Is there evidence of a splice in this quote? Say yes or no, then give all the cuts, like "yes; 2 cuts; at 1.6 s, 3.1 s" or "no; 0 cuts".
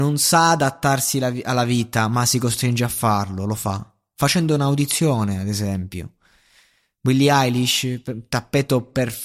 no; 0 cuts